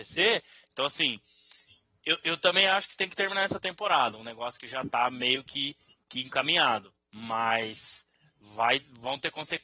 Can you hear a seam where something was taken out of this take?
no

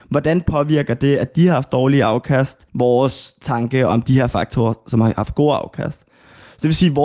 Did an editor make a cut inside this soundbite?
yes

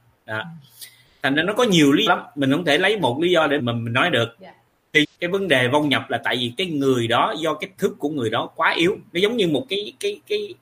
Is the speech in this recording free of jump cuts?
no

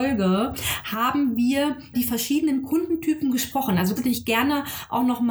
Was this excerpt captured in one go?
no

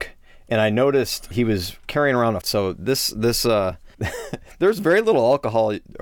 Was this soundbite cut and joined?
yes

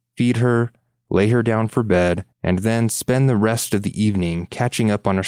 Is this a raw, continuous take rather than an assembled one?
no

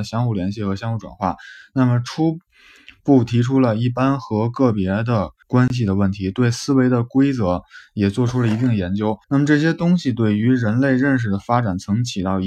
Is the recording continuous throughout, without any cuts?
no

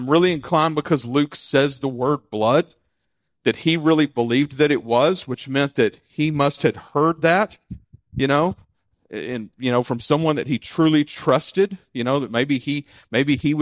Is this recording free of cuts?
yes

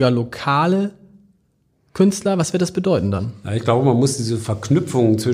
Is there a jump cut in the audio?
no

